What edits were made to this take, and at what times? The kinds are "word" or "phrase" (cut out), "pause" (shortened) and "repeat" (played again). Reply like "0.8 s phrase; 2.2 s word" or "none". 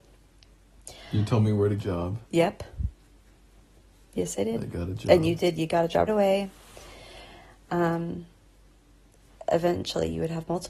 1.8 s phrase; 2.2 s pause; 6.1 s word